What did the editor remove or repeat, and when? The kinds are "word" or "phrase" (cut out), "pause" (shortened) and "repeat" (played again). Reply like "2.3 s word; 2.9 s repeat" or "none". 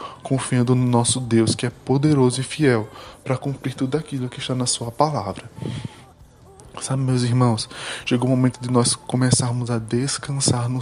none